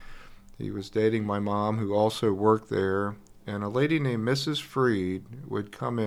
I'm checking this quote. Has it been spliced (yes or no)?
no